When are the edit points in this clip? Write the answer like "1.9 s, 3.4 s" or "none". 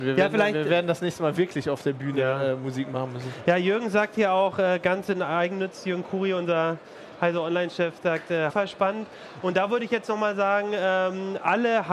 8.5 s